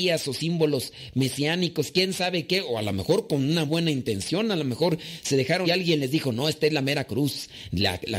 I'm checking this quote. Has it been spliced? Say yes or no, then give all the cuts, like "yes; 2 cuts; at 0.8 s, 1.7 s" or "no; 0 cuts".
yes; 2 cuts; at 3.7 s, 5.6 s